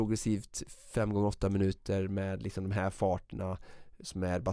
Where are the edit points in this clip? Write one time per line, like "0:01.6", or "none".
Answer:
none